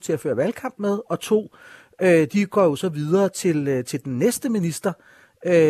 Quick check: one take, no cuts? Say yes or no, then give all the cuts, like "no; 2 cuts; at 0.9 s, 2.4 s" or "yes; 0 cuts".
yes; 0 cuts